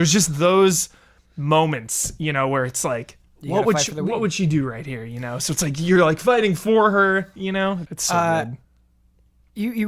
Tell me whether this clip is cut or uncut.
cut